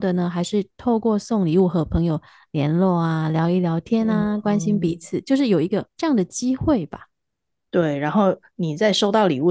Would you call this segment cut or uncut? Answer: cut